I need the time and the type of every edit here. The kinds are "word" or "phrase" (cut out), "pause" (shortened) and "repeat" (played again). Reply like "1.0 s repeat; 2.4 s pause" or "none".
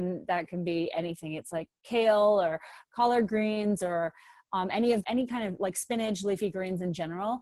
5.0 s phrase